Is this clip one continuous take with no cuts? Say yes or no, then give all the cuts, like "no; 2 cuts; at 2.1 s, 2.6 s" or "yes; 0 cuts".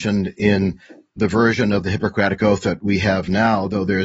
yes; 0 cuts